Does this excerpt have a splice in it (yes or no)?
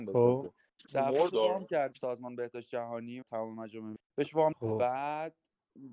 yes